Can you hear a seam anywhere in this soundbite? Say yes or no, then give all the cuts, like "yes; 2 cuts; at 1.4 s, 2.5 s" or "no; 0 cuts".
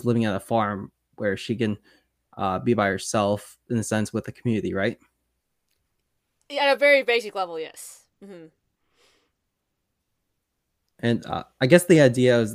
no; 0 cuts